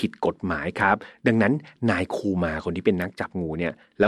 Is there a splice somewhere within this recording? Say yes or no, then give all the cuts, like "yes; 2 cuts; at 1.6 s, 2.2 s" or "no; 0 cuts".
no; 0 cuts